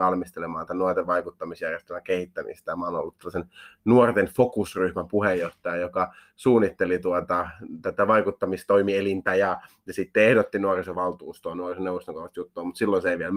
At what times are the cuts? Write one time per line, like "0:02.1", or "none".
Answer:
none